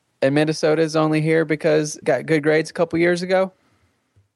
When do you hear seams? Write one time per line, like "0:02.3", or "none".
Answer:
0:02.0